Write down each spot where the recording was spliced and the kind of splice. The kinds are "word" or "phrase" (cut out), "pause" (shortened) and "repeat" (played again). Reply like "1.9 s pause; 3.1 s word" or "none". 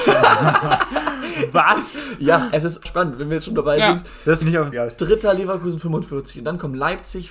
2.9 s word; 4.4 s word; 4.7 s word